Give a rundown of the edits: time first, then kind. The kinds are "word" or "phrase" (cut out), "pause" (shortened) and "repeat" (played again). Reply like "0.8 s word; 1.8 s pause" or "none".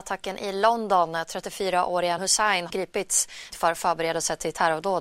2.2 s word; 2.7 s word; 3.5 s word